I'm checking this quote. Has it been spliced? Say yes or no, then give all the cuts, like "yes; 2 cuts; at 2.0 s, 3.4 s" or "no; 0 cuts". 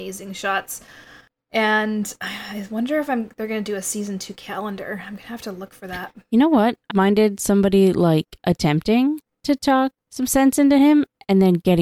yes; 2 cuts; at 6.9 s, 10.0 s